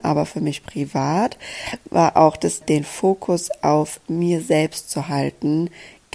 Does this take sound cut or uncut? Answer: cut